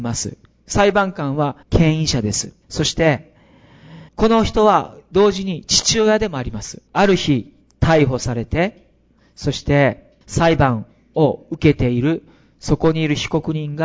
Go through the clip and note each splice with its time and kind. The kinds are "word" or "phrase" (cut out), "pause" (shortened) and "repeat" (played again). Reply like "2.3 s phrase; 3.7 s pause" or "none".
1.6 s pause; 2.6 s pause; 4.1 s pause; 6.9 s pause; 10.2 s pause